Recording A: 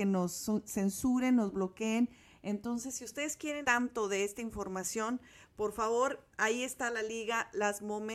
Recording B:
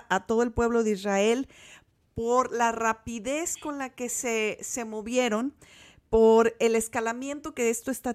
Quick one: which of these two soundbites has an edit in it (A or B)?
A